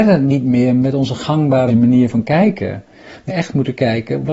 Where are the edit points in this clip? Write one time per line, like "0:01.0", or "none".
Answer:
0:01.7
0:03.3